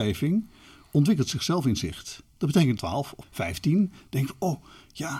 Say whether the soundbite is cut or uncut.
cut